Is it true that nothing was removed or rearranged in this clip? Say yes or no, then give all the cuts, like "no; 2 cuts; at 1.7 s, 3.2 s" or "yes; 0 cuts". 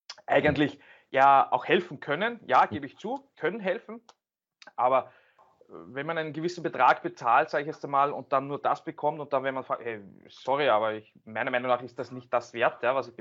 no; 1 cut; at 3.3 s